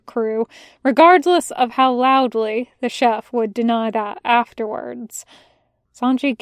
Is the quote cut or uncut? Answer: uncut